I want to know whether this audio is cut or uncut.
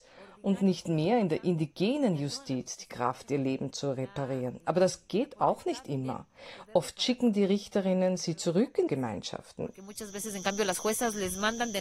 cut